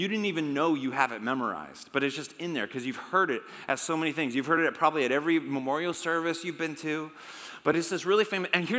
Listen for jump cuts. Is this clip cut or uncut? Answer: uncut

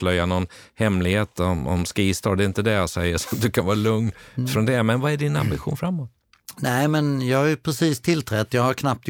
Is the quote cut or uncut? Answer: uncut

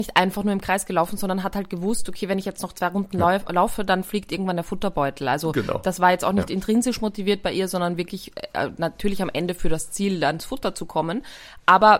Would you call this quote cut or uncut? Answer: uncut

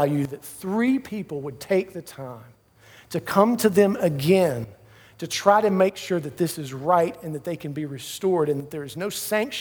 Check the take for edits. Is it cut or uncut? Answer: uncut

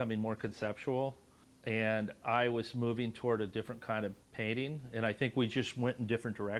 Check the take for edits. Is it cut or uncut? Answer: cut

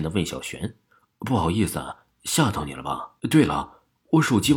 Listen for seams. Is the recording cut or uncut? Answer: cut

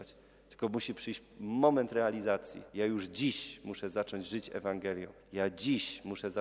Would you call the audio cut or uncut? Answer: cut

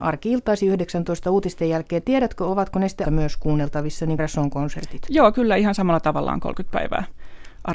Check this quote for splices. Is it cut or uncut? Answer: cut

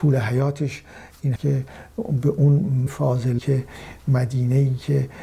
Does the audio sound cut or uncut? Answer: cut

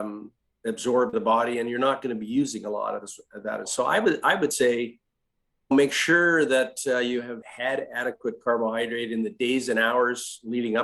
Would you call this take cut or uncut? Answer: cut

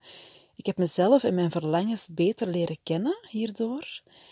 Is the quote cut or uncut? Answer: uncut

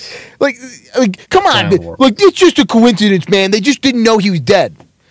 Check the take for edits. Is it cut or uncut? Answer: cut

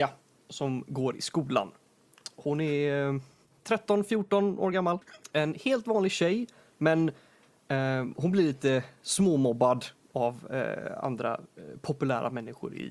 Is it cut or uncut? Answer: uncut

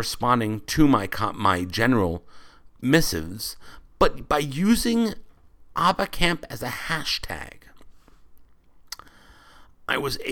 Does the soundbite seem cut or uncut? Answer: cut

